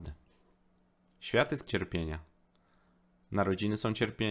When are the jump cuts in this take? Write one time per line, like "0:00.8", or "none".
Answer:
0:01.7